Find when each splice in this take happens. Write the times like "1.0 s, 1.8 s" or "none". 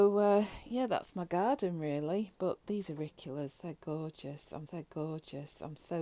4.7 s